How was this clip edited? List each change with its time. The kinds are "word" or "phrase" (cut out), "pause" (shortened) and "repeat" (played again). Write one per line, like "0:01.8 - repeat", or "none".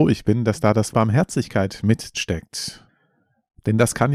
0:00.9 - word
0:02.1 - word